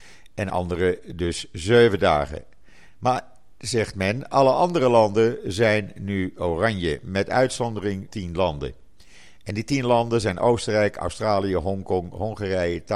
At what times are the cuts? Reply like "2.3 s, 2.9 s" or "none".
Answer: 8.1 s